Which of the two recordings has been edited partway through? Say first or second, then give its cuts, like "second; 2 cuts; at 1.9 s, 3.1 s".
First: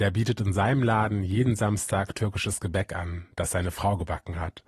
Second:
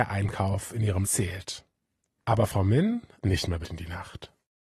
second; 3 cuts; at 1.0 s, 3.2 s, 3.6 s